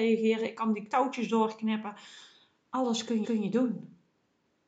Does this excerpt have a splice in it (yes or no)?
yes